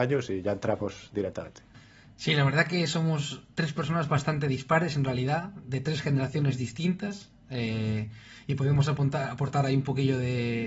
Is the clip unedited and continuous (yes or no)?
yes